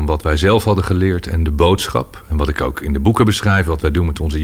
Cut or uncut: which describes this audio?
uncut